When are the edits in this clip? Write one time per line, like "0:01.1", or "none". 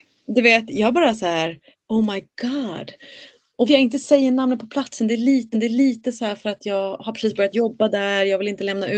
0:01.7
0:03.7
0:05.5